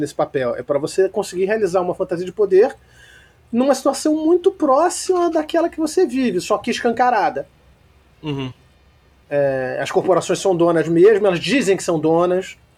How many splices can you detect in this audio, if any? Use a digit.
0